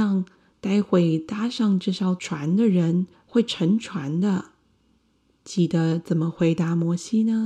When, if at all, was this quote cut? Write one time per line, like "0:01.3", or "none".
0:03.1
0:05.0